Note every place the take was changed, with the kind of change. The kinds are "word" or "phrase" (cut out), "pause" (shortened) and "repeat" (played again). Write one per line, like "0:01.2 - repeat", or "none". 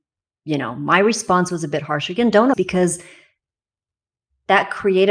0:02.5 - word